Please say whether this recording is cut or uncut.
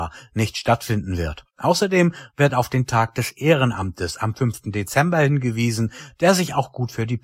uncut